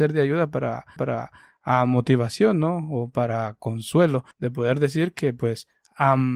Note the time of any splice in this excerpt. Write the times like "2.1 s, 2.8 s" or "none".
1.0 s, 4.3 s